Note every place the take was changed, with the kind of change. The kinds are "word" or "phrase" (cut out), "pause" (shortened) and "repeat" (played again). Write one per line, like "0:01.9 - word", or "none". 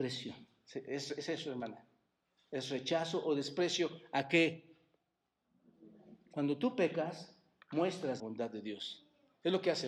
0:08.2 - phrase